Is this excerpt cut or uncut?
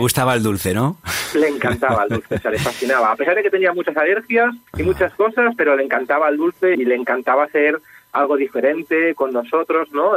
cut